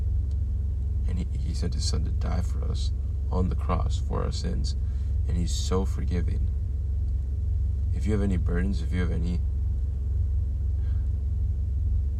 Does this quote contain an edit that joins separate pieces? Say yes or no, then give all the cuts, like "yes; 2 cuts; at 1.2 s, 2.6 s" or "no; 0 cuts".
no; 0 cuts